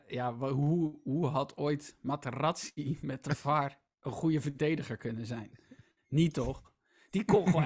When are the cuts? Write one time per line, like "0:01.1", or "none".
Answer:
none